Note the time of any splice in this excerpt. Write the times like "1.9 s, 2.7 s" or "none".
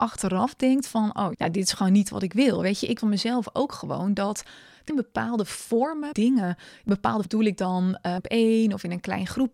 1.3 s, 3.0 s, 4.9 s, 6.1 s, 7.2 s, 8.2 s